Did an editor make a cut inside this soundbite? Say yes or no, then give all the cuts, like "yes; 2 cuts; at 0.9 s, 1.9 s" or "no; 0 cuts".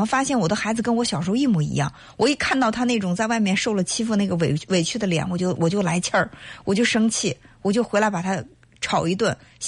no; 0 cuts